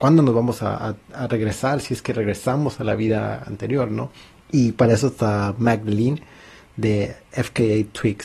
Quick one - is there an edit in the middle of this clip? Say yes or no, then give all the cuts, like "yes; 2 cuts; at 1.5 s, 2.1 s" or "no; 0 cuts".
no; 0 cuts